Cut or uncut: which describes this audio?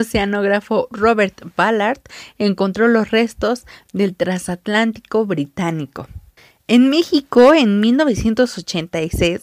cut